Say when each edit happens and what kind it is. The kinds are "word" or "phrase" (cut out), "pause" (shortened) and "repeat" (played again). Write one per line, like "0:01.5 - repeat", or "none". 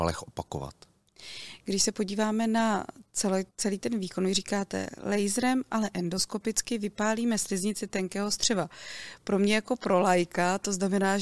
0:03.5 - pause